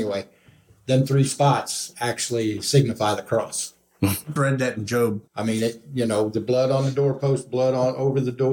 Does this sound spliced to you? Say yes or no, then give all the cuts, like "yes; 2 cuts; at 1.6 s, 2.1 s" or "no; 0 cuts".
yes; 2 cuts; at 4.4 s, 5.3 s